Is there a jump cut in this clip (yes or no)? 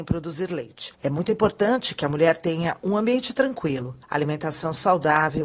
yes